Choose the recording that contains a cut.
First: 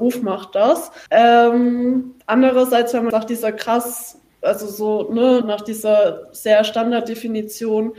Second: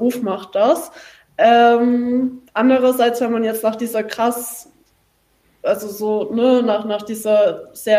first; 4 cuts; at 1.1 s, 3.1 s, 4.3 s, 5.4 s

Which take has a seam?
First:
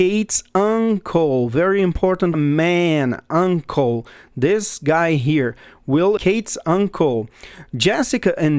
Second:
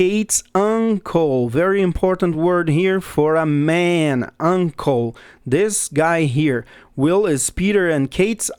first; 2 cuts; at 2.3 s, 6.2 s

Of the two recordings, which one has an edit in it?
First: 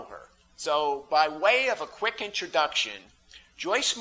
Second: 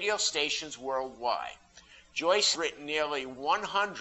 second; 1 cut; at 2.5 s

